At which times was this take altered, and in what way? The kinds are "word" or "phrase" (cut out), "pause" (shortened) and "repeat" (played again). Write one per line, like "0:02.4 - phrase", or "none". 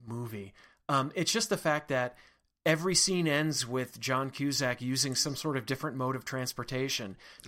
none